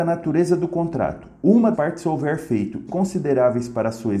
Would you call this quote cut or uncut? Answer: cut